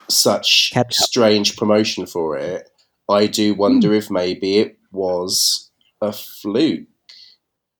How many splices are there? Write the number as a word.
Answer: zero